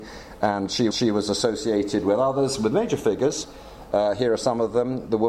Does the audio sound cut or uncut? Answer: cut